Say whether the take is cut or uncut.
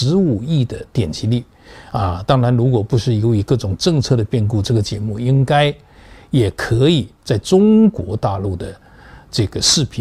uncut